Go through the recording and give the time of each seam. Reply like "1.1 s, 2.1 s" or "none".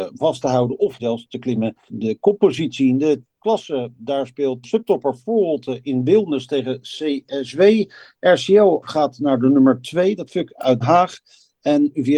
1.0 s, 1.9 s, 3.2 s, 4.6 s, 10.3 s, 10.8 s